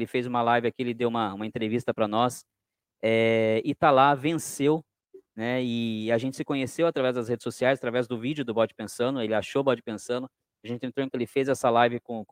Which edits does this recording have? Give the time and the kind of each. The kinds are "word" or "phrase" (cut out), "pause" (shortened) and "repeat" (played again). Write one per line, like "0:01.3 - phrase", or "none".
0:11.1 - word